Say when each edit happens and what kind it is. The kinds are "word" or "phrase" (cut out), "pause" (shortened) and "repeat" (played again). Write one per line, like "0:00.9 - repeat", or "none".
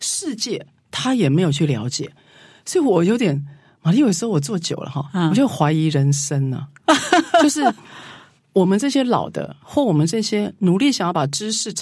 none